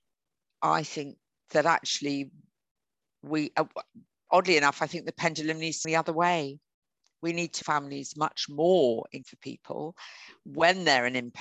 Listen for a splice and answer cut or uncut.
cut